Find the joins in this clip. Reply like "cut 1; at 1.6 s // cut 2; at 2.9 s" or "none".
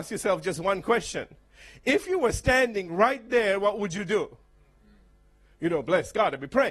none